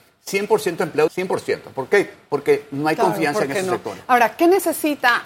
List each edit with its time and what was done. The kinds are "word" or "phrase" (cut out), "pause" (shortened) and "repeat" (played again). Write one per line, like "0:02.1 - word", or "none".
0:01.1 - word